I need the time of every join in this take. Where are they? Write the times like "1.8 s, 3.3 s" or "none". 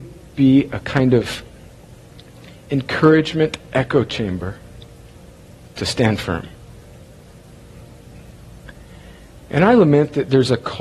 none